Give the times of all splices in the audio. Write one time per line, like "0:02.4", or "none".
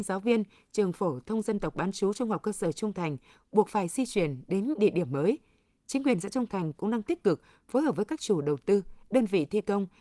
none

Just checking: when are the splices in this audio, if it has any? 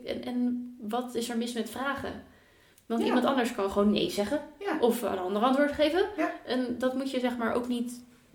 none

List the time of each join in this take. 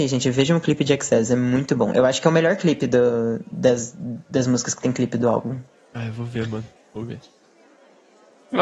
0:05.7

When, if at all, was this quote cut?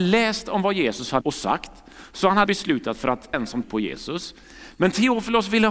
0:01.2
0:02.5
0:02.9
0:03.3
0:03.6

